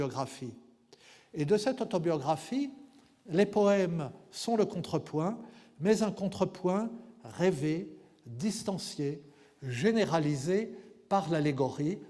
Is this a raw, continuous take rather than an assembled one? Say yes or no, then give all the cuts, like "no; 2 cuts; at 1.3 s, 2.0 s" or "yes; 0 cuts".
yes; 0 cuts